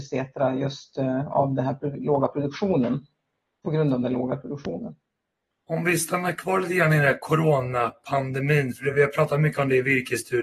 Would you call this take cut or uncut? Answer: uncut